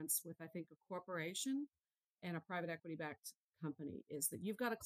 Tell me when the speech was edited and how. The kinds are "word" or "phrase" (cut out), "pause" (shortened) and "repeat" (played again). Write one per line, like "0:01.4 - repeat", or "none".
none